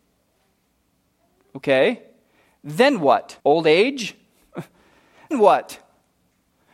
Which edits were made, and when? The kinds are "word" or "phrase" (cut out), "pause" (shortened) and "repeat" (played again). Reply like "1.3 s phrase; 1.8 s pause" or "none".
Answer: 3.4 s pause; 5.3 s word